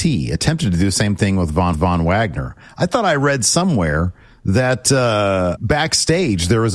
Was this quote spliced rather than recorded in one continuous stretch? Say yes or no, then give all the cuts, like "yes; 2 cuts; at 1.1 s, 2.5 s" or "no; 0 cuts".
yes; 2 cuts; at 1.7 s, 5.6 s